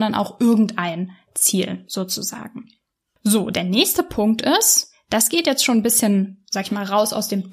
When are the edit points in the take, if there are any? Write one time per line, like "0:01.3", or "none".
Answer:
none